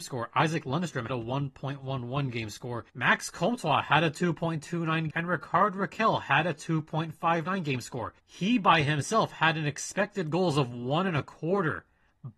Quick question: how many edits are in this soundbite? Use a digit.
4